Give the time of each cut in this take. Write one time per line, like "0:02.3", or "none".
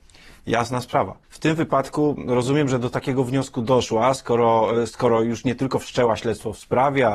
0:01.2